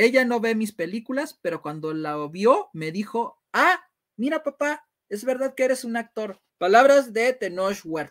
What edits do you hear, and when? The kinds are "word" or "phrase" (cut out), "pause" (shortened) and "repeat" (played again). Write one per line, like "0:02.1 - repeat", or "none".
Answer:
0:06.5 - pause